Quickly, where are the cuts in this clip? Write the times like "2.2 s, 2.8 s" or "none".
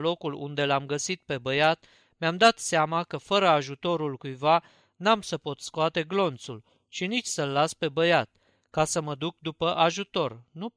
none